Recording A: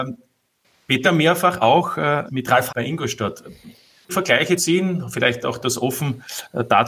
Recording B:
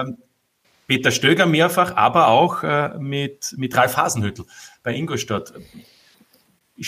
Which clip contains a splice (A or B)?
A